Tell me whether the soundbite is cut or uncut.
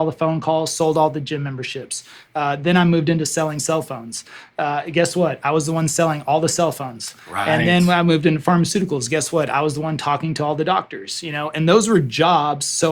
uncut